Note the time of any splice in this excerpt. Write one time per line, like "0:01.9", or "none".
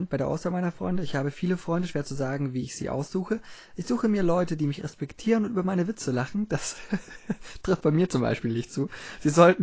none